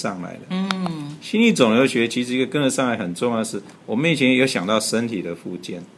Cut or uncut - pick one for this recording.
cut